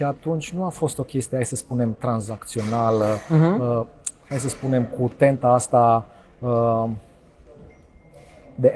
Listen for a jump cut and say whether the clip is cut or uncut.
uncut